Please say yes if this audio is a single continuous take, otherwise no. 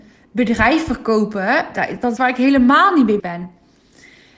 no